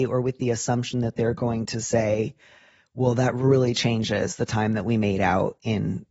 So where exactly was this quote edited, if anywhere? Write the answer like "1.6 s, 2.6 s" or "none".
none